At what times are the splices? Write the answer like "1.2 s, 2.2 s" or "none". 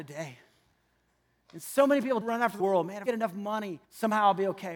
2.2 s, 2.6 s, 3.1 s, 3.8 s